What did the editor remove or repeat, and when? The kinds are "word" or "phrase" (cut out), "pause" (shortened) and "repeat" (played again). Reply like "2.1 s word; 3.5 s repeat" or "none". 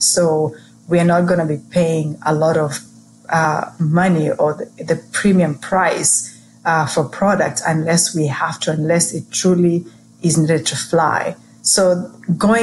none